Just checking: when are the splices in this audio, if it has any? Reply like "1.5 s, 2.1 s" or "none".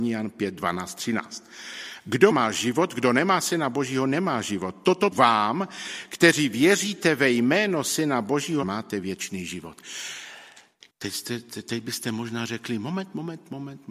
2.3 s, 5.1 s, 8.6 s, 10.9 s